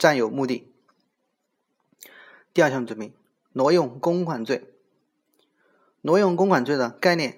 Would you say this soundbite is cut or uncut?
uncut